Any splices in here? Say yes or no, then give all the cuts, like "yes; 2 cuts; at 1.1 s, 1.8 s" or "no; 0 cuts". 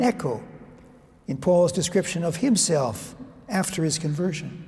no; 0 cuts